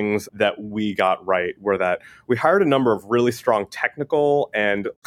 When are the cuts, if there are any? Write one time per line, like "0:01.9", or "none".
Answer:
none